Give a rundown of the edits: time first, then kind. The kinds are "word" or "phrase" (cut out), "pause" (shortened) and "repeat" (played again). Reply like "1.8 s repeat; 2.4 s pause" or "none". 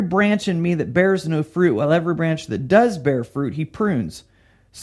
none